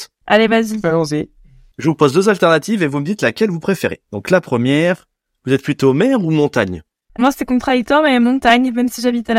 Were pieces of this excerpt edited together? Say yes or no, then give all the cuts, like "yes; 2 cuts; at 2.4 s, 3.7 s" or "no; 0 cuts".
yes; 2 cuts; at 4.0 s, 7.2 s